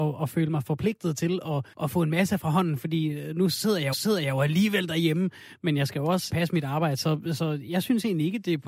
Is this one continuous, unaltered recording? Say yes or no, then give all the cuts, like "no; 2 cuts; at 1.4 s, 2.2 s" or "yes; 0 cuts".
no; 3 cuts; at 1.7 s, 3.9 s, 6.3 s